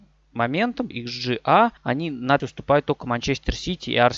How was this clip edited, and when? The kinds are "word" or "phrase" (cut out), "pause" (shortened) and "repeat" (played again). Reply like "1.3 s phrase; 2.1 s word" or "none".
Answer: 0.9 s word; 1.8 s pause; 2.4 s phrase